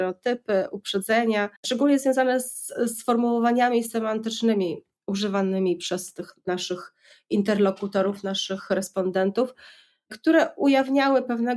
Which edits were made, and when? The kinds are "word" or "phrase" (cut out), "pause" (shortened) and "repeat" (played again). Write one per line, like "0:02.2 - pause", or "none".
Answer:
0:01.6 - pause